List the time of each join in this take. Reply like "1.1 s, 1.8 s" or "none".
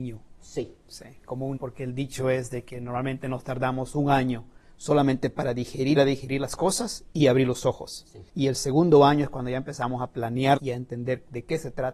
1.6 s, 6.0 s, 8.3 s, 10.6 s